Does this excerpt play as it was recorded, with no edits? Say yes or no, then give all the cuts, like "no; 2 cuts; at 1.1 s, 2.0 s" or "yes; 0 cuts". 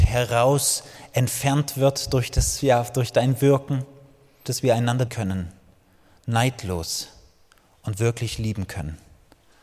no; 2 cuts; at 4.4 s, 5.1 s